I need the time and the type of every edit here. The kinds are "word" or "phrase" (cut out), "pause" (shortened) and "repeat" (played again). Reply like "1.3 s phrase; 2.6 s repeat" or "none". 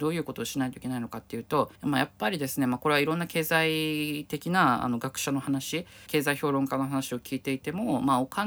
1.8 s pause; 6.1 s phrase